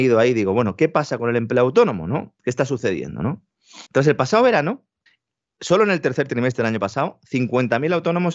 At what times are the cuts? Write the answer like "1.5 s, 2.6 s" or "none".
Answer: 3.9 s, 5.1 s